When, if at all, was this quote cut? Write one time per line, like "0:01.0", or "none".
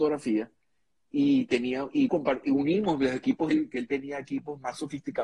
0:02.1
0:03.5